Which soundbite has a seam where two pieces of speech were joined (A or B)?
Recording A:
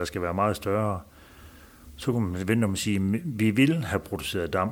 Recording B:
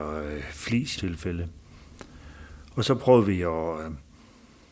B